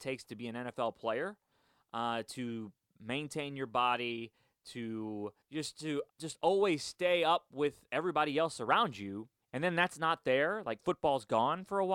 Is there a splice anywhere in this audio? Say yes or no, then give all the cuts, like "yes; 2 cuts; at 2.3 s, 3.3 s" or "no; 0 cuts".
yes; 3 cuts; at 5.4 s, 6.1 s, 9.4 s